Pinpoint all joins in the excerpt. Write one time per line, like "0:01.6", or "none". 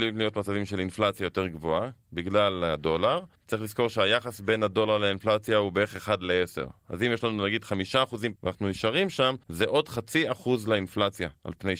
0:03.3
0:08.4
0:09.4

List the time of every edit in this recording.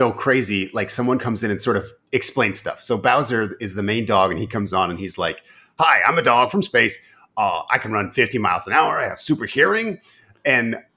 none

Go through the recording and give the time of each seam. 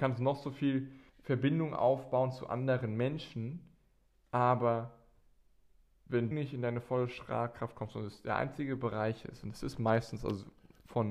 0:01.1
0:06.3

